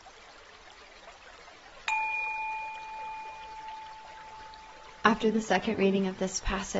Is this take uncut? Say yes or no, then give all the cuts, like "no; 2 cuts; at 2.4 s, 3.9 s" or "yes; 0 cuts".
yes; 0 cuts